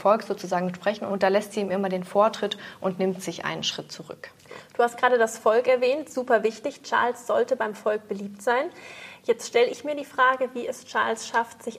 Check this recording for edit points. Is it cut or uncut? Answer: uncut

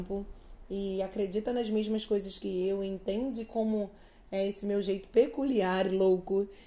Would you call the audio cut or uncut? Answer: uncut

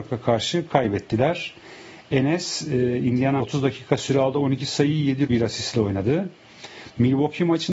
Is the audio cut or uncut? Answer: cut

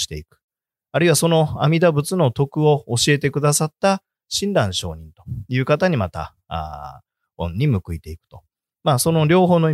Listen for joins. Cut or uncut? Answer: uncut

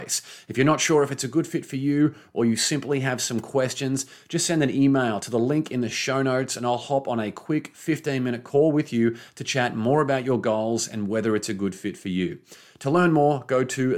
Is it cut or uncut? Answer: uncut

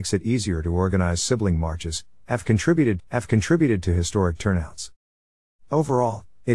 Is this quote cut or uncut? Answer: cut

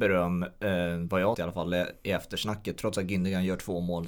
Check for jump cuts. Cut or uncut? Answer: cut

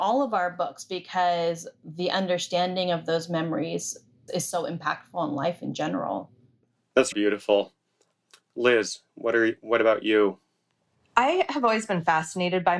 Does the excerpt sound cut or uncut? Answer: cut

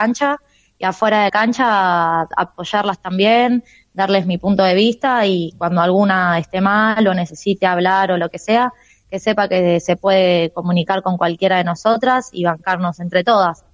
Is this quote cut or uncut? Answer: cut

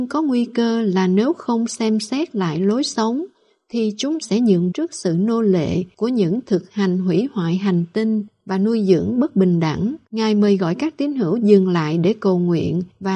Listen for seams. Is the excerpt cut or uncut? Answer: cut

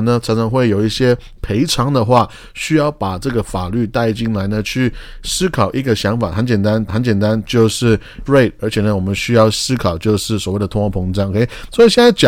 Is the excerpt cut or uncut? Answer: cut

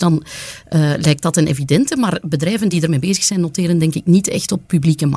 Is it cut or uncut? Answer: uncut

